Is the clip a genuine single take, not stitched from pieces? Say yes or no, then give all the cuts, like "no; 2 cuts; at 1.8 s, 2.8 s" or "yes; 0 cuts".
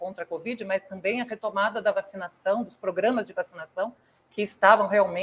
yes; 0 cuts